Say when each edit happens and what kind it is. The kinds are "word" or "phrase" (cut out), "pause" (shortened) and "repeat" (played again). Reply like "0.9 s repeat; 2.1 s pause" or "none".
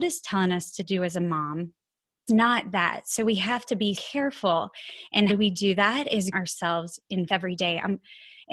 2.3 s word; 3.9 s word; 5.3 s word; 6.3 s word; 7.3 s word